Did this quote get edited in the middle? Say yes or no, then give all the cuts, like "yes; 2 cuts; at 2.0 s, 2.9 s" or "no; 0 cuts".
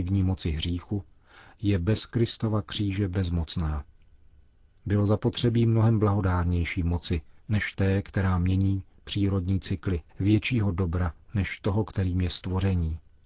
yes; 1 cut; at 10.1 s